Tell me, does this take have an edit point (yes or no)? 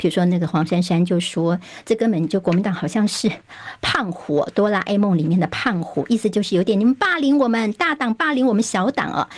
no